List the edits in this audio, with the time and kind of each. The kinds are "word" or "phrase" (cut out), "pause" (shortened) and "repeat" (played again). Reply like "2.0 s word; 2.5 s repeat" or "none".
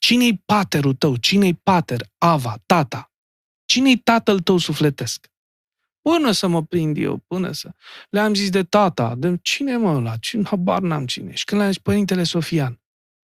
none